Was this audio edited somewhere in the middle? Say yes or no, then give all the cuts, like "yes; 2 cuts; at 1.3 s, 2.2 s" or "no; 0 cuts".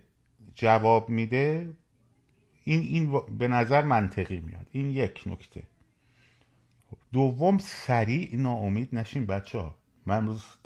yes; 1 cut; at 7.0 s